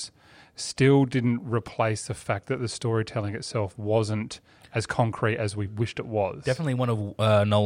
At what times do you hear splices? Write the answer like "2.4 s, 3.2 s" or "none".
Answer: 5.7 s